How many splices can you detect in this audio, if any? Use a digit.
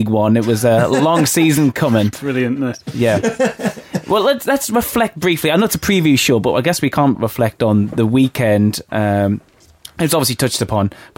1